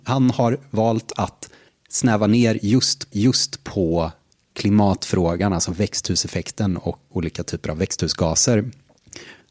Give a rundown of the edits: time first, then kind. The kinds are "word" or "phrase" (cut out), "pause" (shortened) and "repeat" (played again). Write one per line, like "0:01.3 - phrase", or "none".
0:03.1 - repeat
0:07.1 - word